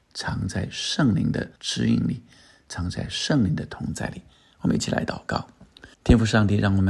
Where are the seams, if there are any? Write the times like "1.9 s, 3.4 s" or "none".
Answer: 1.6 s, 5.9 s